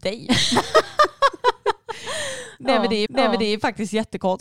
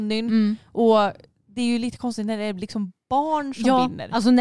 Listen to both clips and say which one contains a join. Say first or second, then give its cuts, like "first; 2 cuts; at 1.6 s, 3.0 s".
first; 1 cut; at 3.1 s